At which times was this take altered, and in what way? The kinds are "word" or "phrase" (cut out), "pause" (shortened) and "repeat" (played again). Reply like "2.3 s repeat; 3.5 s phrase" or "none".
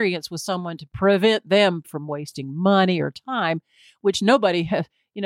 1.8 s word